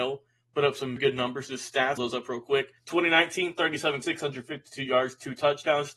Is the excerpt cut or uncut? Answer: cut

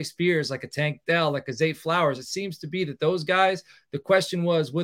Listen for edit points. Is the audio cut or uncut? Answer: uncut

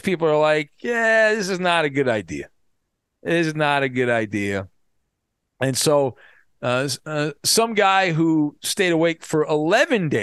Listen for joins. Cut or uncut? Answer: uncut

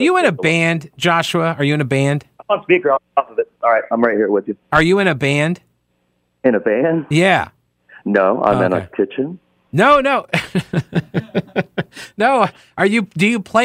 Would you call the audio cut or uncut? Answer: cut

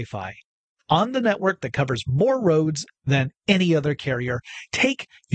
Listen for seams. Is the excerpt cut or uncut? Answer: uncut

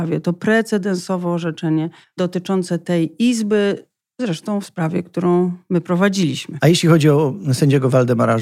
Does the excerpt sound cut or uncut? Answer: uncut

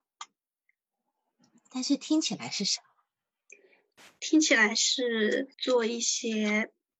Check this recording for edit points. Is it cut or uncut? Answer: cut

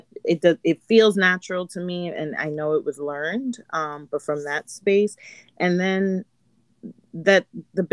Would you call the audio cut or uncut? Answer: uncut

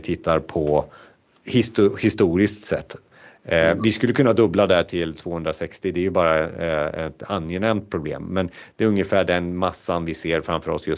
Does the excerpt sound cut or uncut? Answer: uncut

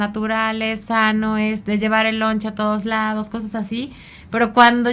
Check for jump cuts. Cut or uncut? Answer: uncut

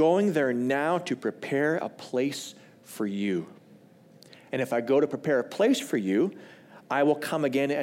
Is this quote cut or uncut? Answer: uncut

